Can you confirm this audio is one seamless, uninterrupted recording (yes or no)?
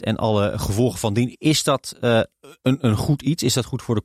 yes